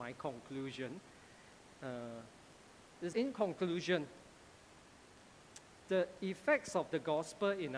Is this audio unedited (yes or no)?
no